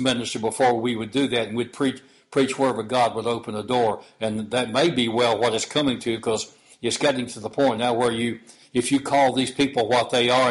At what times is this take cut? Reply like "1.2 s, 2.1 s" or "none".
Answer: none

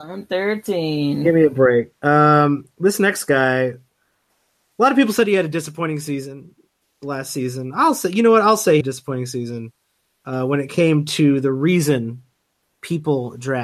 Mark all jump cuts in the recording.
8.8 s

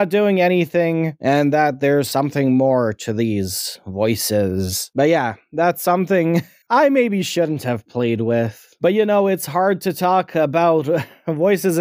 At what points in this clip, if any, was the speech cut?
6.6 s

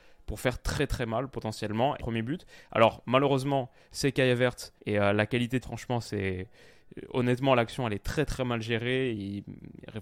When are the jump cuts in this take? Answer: 2.0 s, 4.8 s, 5.6 s

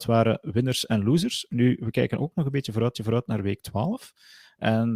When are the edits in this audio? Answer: 2.9 s

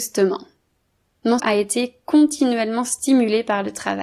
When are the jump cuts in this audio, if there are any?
1.4 s

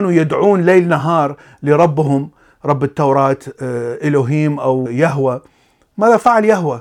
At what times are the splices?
none

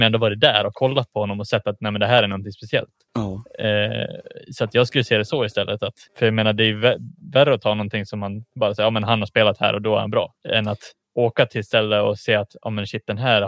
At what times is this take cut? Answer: 3.1 s, 6.1 s, 10.4 s, 11.0 s

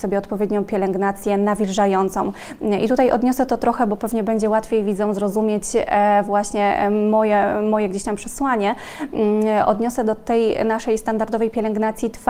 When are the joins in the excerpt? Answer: none

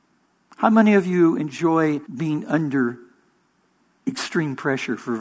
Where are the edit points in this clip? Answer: 2.1 s

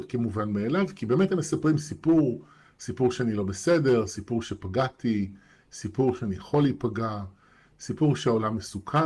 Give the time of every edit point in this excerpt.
none

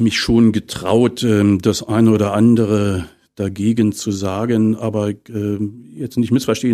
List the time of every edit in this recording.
none

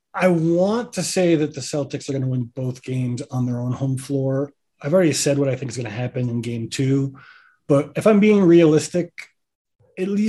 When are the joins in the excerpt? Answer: none

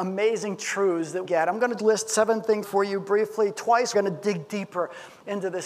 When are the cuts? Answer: 1.2 s, 1.8 s, 2.6 s, 3.9 s

